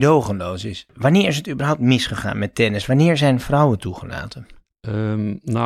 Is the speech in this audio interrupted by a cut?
no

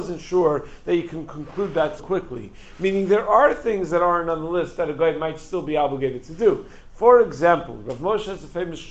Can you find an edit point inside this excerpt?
yes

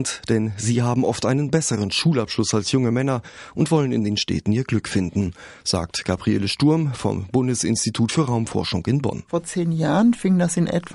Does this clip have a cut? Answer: no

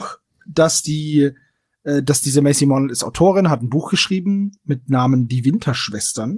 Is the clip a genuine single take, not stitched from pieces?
yes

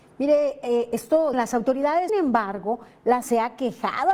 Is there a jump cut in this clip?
yes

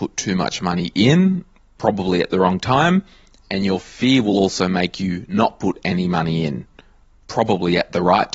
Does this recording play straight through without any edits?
yes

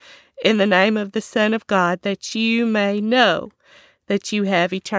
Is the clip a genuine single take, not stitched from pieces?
yes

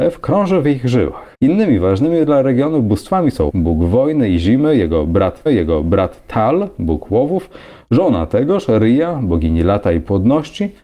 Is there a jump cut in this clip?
yes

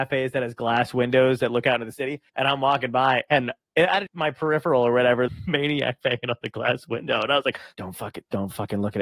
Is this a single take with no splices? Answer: no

